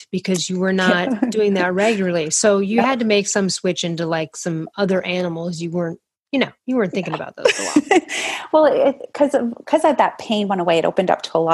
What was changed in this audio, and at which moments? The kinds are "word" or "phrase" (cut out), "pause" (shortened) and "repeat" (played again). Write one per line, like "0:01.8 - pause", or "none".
none